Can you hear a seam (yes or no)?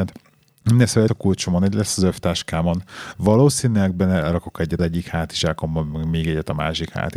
yes